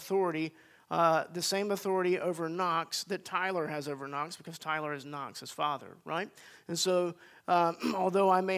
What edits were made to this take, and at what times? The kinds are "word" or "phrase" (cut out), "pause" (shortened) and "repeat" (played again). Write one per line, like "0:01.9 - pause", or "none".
none